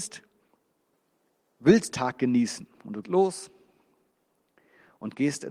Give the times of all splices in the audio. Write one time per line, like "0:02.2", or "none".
0:01.9
0:03.0